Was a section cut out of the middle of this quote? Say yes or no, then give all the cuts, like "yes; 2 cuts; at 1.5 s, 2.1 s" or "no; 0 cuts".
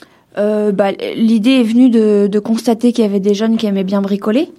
no; 0 cuts